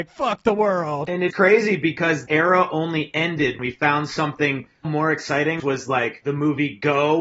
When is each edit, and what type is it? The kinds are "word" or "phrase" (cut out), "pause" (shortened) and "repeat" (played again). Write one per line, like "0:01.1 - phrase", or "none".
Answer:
0:01.3 - word
0:02.3 - word
0:03.6 - word
0:04.8 - word
0:05.6 - word